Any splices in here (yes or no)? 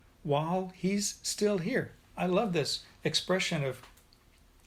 yes